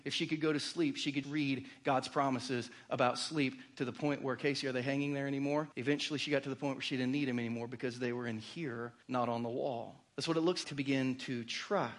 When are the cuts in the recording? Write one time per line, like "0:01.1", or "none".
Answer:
0:01.2
0:05.7
0:09.0
0:10.1
0:10.6

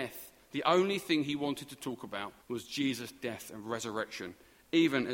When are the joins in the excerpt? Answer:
0:02.4

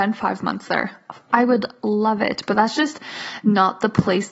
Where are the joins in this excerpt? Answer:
none

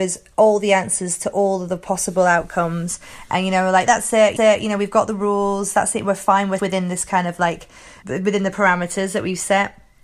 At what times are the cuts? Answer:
0:03.9
0:04.4
0:06.6
0:08.0

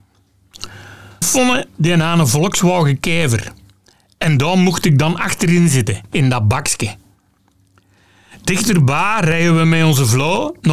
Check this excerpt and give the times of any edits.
0:01.2

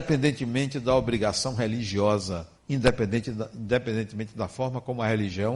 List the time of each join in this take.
0:02.5

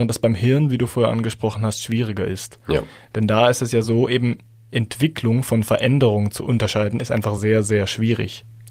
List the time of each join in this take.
none

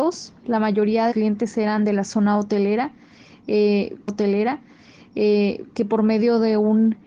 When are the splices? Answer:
0:01.1
0:04.1

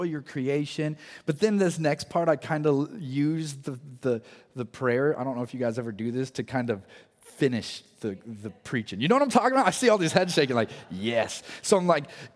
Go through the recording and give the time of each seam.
none

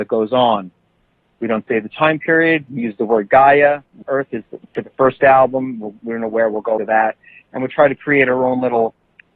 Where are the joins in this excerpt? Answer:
0:04.0
0:06.8

